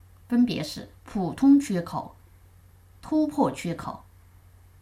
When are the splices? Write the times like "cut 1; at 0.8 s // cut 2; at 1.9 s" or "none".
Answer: cut 1; at 1.0 s

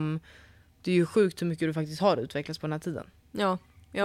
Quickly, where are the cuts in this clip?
none

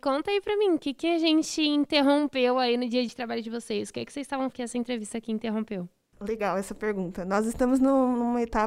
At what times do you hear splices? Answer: cut 1; at 3.1 s // cut 2; at 4.5 s

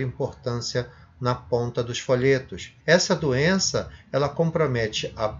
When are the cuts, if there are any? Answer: cut 1; at 2.8 s

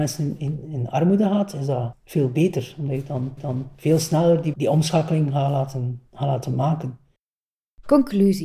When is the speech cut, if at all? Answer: cut 1; at 3.4 s // cut 2; at 4.5 s // cut 3; at 6.1 s

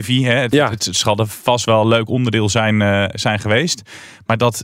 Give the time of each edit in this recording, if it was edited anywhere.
none

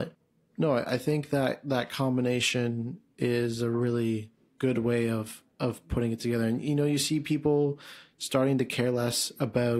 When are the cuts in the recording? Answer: none

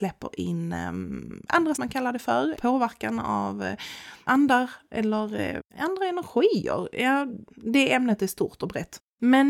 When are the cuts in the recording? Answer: cut 1; at 1.7 s // cut 2; at 2.5 s // cut 3; at 4.3 s // cut 4; at 5.7 s // cut 5; at 7.5 s

